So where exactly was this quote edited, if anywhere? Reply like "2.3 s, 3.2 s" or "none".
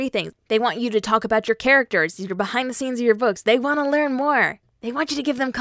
none